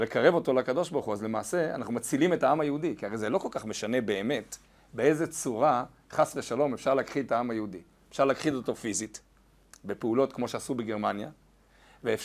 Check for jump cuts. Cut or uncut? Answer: uncut